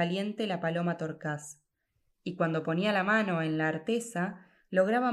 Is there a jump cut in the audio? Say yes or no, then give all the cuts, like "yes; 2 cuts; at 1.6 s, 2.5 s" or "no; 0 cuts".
no; 0 cuts